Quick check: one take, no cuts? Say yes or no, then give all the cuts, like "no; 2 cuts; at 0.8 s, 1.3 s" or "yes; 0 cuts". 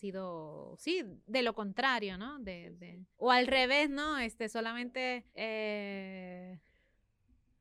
no; 2 cuts; at 3.1 s, 5.3 s